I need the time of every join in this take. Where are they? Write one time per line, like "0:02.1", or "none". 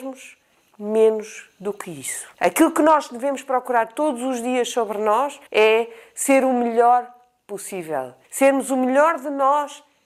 0:02.3
0:05.5
0:08.2